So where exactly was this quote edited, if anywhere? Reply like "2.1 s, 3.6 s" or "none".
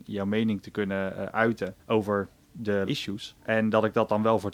1.8 s, 2.9 s, 3.4 s